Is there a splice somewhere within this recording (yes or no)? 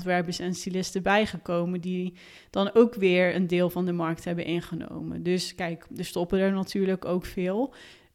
no